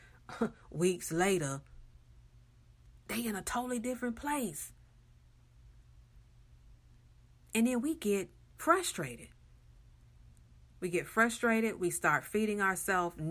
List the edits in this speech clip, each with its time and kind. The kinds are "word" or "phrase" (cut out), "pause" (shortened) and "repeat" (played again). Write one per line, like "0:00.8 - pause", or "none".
none